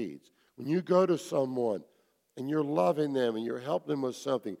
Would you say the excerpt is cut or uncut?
uncut